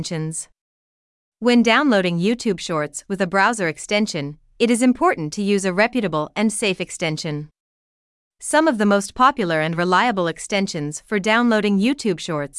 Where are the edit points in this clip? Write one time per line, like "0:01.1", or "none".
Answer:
none